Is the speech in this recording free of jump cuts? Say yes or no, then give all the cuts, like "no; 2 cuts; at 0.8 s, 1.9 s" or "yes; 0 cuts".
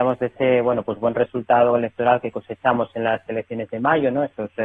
yes; 0 cuts